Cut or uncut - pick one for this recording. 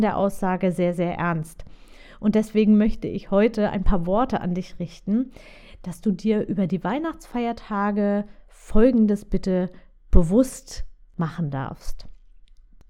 uncut